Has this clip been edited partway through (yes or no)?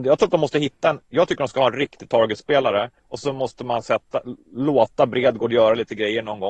yes